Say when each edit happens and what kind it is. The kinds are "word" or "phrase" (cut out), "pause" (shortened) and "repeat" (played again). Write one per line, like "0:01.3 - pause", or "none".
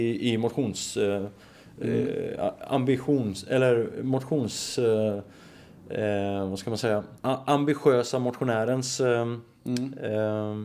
0:07.2 - pause